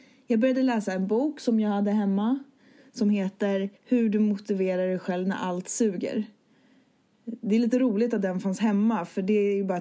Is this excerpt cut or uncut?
cut